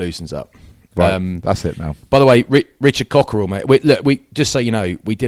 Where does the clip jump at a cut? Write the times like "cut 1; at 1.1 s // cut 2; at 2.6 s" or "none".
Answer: none